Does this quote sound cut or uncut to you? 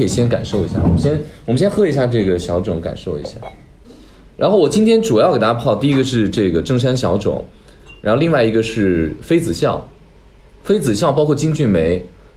uncut